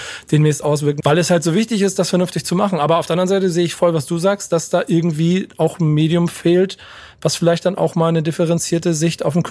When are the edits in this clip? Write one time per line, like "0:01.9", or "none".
0:01.0